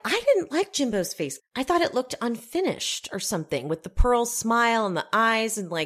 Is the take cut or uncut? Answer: cut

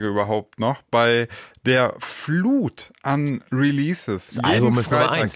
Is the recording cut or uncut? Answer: uncut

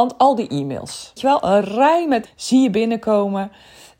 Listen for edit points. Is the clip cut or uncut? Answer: cut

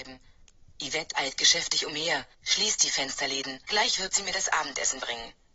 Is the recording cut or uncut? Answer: cut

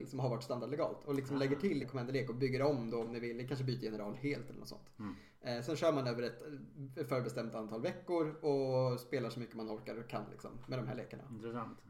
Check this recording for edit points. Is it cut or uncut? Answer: cut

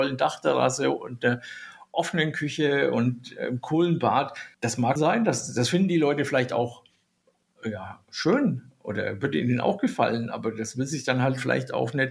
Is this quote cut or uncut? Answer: cut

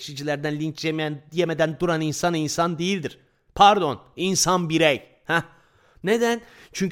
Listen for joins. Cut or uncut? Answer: uncut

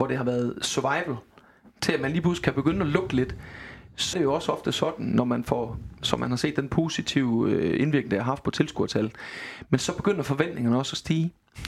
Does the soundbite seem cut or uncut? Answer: cut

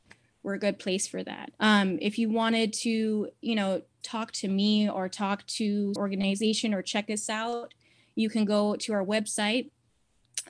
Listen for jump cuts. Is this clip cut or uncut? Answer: cut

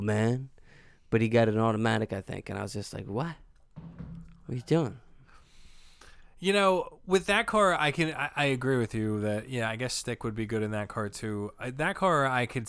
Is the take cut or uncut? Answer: uncut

